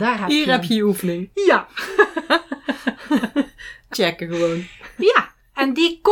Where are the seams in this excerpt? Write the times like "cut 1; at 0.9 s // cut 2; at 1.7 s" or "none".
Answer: cut 1; at 3.9 s